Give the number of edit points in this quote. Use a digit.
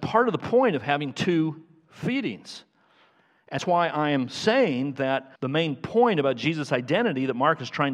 2